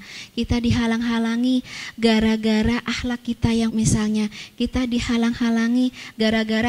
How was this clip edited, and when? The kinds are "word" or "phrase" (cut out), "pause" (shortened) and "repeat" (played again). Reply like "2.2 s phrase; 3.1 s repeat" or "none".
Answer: 3.7 s word

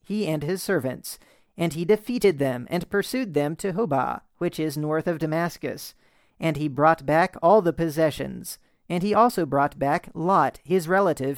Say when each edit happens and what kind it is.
none

